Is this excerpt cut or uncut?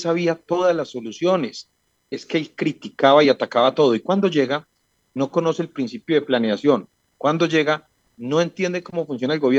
uncut